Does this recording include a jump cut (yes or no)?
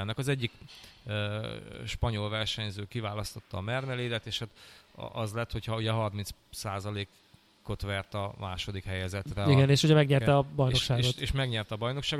no